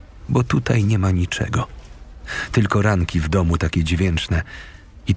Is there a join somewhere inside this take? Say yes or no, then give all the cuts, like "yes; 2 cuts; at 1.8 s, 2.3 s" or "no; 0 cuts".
no; 0 cuts